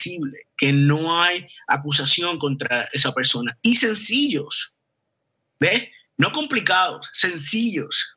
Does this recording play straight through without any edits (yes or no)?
yes